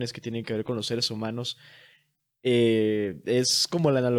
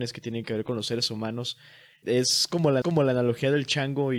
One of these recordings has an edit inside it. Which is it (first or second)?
second